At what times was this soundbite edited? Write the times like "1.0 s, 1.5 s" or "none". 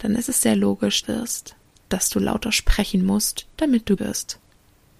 1.0 s, 4.0 s